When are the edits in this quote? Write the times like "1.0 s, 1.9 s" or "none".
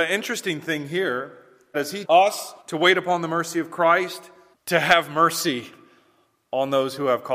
1.7 s, 2.0 s, 2.6 s, 4.5 s